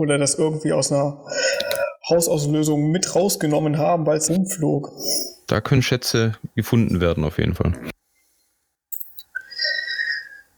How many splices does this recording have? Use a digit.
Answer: 1